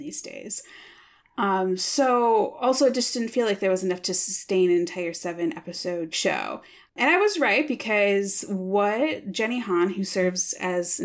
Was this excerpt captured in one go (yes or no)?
no